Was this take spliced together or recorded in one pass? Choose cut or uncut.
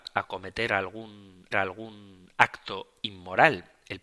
cut